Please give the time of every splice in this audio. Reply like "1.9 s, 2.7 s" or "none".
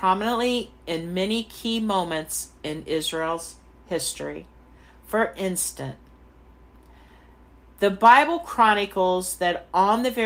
none